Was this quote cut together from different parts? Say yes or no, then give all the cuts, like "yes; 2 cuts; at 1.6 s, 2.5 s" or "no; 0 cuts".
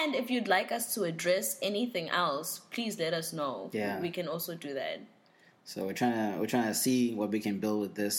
no; 0 cuts